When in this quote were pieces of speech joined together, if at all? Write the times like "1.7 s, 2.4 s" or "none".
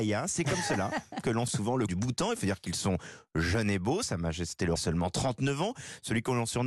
1.5 s, 1.9 s, 4.8 s